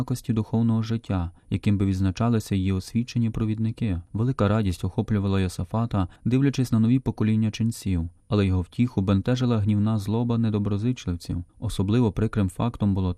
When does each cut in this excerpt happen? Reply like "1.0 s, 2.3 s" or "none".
1.4 s, 4.1 s, 6.2 s, 8.2 s, 11.5 s

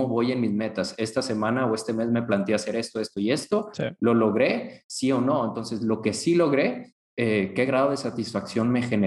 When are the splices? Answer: none

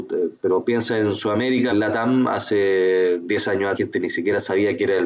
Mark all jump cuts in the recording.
1.7 s, 3.7 s

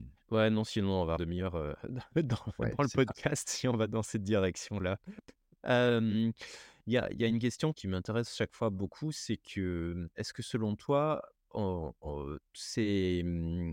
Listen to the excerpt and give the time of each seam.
1.2 s, 7.7 s

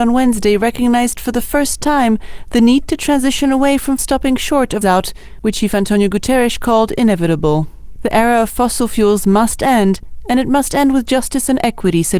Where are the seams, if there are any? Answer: 4.0 s, 4.8 s, 5.5 s

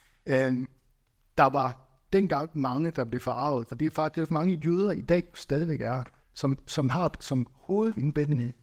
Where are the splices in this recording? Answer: 4.3 s, 6.2 s

